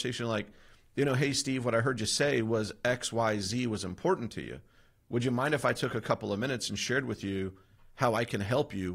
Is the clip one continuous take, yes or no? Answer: yes